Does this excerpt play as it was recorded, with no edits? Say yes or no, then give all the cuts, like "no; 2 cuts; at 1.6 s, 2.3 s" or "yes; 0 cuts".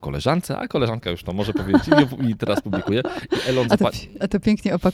yes; 0 cuts